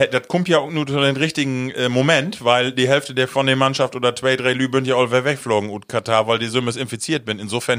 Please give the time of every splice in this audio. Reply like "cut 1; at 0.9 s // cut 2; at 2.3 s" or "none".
none